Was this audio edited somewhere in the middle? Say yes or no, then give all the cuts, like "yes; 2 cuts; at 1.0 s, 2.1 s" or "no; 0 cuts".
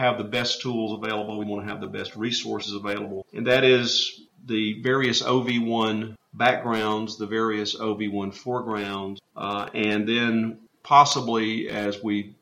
no; 0 cuts